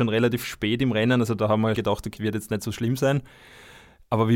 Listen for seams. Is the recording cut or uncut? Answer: cut